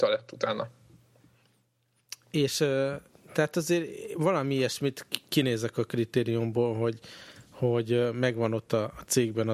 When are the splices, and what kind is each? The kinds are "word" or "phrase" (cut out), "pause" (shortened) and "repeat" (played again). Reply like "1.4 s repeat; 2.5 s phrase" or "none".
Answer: none